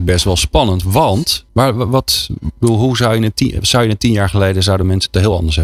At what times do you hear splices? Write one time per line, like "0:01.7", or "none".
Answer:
0:01.5